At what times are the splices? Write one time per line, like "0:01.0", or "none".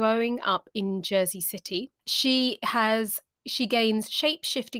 0:02.0